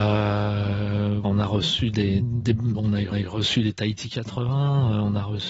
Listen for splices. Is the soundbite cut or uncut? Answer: cut